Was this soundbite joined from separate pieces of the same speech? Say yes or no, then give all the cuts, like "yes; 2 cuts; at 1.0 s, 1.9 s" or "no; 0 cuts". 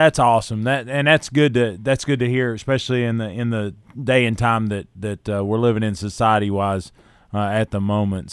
no; 0 cuts